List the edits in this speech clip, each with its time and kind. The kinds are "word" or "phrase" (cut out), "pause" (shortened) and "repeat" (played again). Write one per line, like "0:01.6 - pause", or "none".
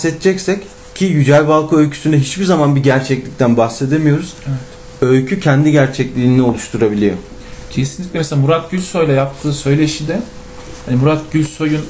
none